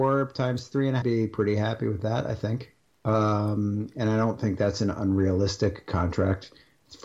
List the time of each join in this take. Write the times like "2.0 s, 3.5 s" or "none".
1.0 s